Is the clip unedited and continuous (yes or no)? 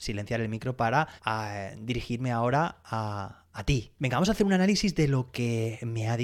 no